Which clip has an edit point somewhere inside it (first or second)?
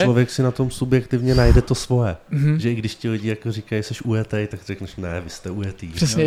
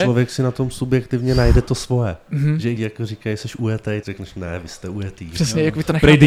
second